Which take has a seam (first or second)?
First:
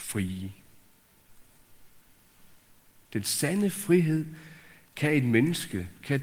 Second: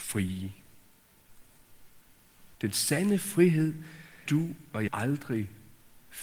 second